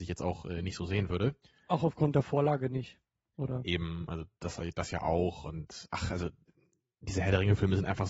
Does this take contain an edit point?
no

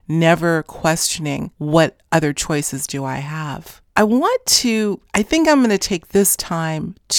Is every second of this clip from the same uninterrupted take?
no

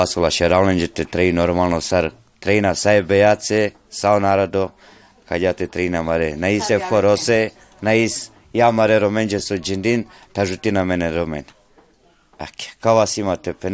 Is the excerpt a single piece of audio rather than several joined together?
yes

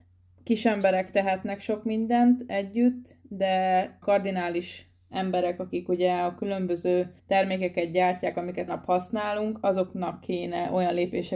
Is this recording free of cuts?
no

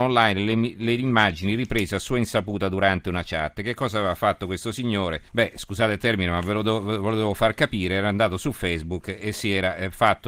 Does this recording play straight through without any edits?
no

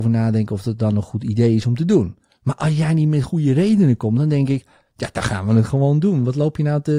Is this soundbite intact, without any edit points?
yes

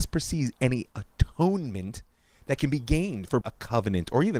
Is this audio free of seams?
no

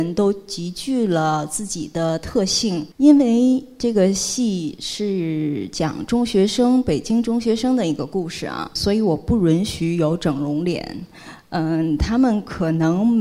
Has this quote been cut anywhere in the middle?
yes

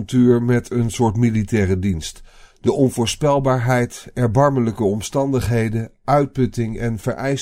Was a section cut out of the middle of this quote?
no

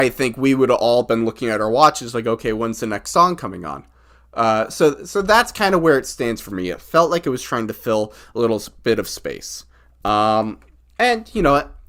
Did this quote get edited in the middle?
no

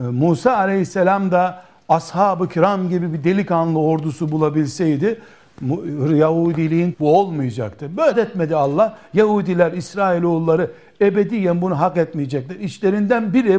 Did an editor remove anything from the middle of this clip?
yes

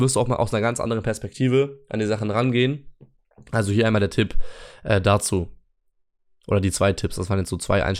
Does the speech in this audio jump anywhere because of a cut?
no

